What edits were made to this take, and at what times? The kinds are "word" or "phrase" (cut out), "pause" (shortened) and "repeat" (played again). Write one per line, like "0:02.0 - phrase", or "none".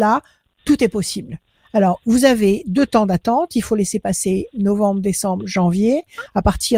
none